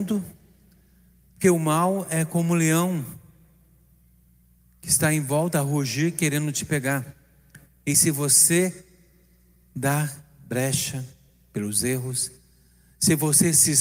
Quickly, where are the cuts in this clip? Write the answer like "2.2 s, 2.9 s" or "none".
none